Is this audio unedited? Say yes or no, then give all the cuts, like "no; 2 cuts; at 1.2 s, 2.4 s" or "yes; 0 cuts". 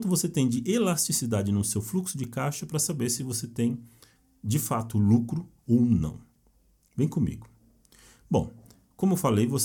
yes; 0 cuts